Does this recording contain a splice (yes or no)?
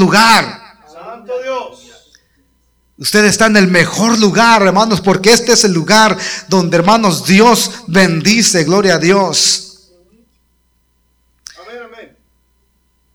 no